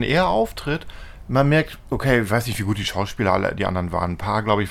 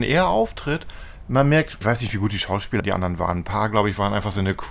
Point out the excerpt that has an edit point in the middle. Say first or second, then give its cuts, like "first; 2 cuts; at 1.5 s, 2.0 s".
second; 2 cuts; at 1.8 s, 2.8 s